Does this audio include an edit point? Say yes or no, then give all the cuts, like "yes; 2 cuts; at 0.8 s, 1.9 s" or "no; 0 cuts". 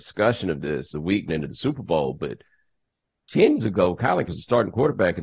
yes; 4 cuts; at 0.9 s, 1.3 s, 3.6 s, 4.3 s